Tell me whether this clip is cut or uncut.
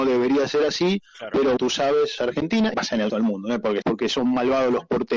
cut